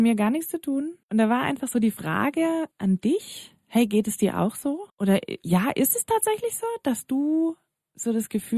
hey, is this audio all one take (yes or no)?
no